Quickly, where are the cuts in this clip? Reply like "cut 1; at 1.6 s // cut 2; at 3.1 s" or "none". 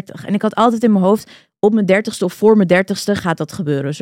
none